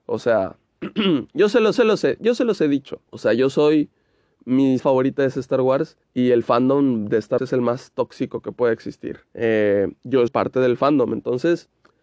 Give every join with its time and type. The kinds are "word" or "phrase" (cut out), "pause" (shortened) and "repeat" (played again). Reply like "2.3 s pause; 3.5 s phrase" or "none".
1.7 s repeat; 3.1 s pause; 4.8 s word; 6.0 s pause; 7.4 s word; 9.3 s pause; 10.3 s word

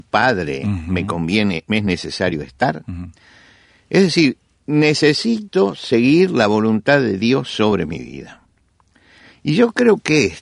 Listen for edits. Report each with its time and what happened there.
none

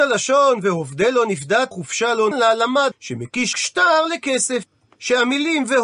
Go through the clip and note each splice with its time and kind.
1.7 s word; 2.3 s word; 2.9 s word; 3.5 s word

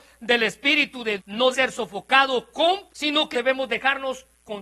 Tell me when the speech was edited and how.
1.2 s word; 1.5 s word; 2.9 s word; 3.3 s word

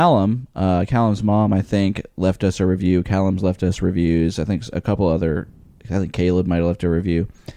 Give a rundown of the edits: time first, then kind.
none

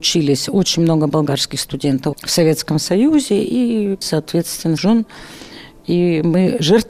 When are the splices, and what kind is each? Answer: 2.1 s word; 4.0 s word; 4.8 s word

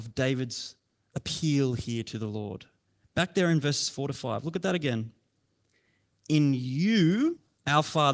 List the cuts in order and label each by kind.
none

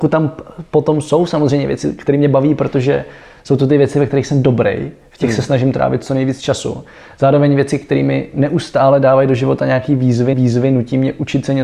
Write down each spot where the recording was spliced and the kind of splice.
10.3 s repeat

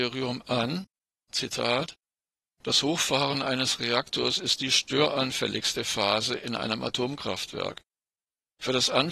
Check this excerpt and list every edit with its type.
none

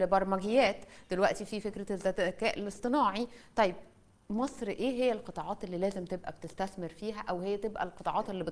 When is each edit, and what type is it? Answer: none

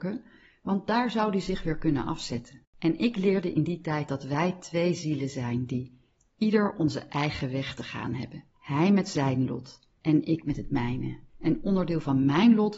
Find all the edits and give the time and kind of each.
2.7 s pause; 8.5 s pause; 10.0 s pause; 11.3 s pause

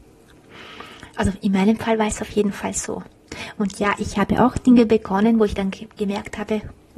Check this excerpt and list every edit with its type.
none

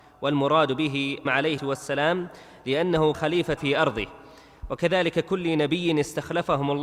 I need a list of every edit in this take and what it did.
1.3 s word; 1.6 s word; 3.1 s word; 3.6 s word

